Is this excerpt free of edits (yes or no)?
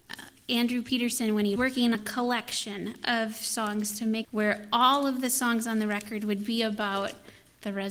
no